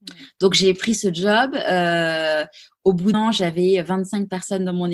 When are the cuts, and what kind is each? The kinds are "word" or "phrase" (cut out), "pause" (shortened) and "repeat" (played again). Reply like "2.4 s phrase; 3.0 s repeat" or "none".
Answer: 3.1 s word